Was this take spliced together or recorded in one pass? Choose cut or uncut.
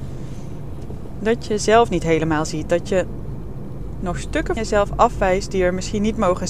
cut